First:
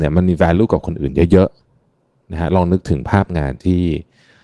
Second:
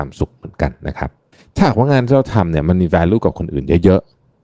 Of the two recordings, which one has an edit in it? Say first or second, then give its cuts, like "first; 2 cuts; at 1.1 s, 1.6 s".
second; 1 cut; at 1.3 s